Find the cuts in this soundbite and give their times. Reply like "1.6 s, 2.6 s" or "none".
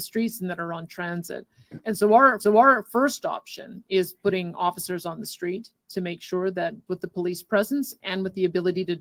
2.4 s, 6.9 s